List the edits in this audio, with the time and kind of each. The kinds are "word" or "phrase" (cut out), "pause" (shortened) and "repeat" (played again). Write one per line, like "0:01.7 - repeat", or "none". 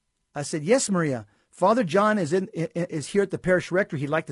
none